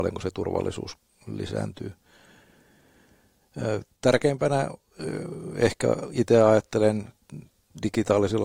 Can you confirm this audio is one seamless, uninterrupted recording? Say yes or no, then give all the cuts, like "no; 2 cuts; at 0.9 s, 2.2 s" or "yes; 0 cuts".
yes; 0 cuts